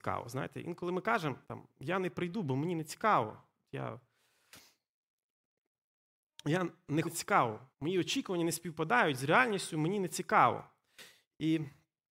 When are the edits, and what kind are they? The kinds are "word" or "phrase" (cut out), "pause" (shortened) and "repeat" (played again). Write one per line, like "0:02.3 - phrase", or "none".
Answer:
0:01.4 - pause
0:07.0 - phrase
0:07.7 - pause

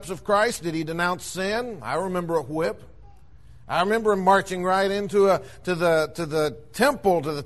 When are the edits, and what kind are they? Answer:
none

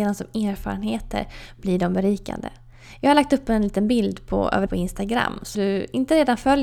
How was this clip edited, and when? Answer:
0:04.7 - word
0:05.5 - word

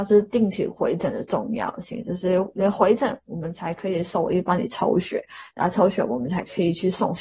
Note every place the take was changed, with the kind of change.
none

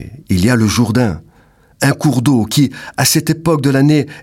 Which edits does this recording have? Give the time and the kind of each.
none

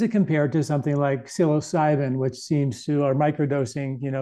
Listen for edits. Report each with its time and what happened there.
none

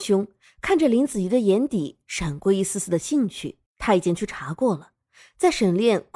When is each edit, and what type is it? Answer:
0:03.7 - pause

